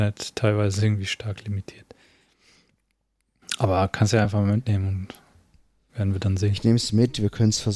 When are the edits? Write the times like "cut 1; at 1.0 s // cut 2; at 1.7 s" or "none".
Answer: none